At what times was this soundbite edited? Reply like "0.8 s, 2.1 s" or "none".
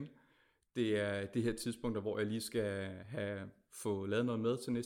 none